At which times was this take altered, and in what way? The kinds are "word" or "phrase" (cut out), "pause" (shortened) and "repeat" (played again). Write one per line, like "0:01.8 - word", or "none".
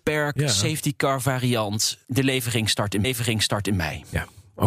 0:03.0 - repeat